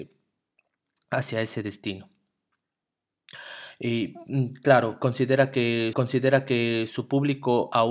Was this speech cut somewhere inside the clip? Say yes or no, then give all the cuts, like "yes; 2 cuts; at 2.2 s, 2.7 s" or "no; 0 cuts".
yes; 1 cut; at 5.9 s